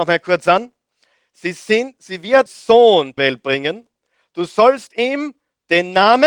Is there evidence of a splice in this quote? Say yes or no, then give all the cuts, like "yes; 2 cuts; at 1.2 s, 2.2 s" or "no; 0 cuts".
yes; 2 cuts; at 2.5 s, 3.2 s